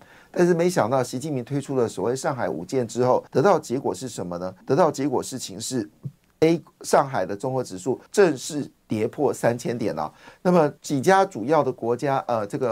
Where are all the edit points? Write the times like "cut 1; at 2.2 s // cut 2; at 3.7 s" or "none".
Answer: cut 1; at 3.3 s // cut 2; at 4.6 s // cut 3; at 8.1 s // cut 4; at 10.8 s